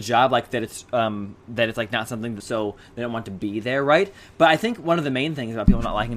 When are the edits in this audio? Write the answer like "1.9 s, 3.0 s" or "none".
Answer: 1.4 s, 2.4 s